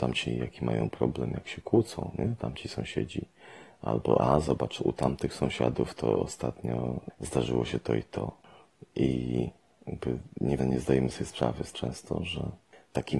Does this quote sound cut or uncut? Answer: cut